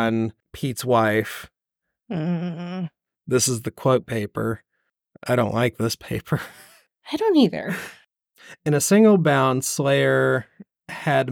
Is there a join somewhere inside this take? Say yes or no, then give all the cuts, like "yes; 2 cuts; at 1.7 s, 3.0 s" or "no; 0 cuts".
no; 0 cuts